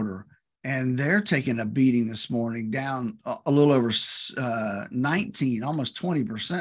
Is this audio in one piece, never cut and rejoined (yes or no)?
yes